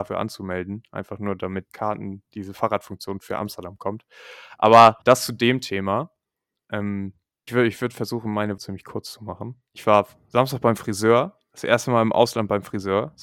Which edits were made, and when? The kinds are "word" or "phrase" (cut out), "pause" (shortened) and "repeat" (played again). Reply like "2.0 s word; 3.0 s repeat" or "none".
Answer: 1.6 s word; 3.2 s word; 5.0 s pause; 7.5 s word; 8.6 s word; 9.7 s pause